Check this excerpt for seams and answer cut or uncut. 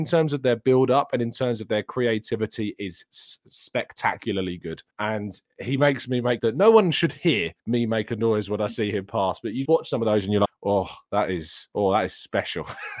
cut